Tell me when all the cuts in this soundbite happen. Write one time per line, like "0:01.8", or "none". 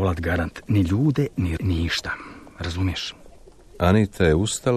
0:01.6